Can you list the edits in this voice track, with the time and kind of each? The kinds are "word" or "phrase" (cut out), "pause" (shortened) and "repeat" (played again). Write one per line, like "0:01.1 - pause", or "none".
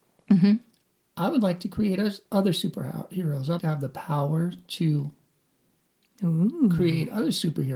0:03.6 - word

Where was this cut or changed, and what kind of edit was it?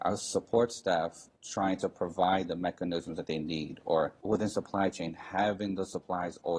0:01.3 - pause
0:04.2 - pause

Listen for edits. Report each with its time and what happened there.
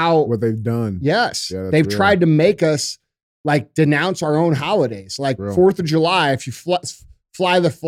none

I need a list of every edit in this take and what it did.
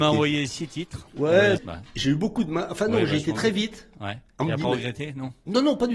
0:01.6 - word
0:04.3 - pause
0:04.6 - word

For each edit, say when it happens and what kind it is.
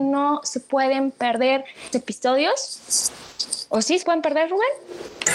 0:01.9 - word
0:04.0 - word

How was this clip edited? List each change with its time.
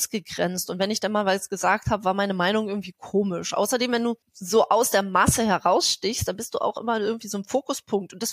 0:04.2 - pause

